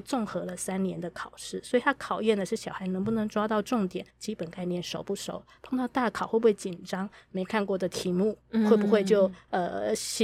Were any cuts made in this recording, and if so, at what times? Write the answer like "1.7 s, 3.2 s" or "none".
4.1 s, 8.4 s